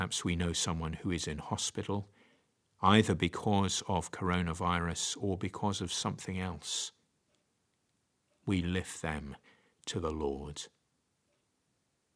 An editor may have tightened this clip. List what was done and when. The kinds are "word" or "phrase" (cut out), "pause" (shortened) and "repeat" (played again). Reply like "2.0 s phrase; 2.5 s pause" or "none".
none